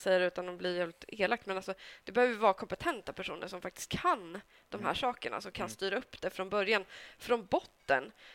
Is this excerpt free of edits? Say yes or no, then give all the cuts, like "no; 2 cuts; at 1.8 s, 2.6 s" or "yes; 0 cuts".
yes; 0 cuts